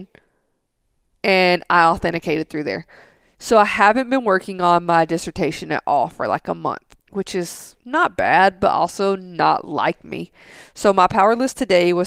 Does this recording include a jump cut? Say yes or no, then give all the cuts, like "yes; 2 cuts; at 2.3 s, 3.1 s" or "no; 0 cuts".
yes; 2 cuts; at 7.0 s, 7.8 s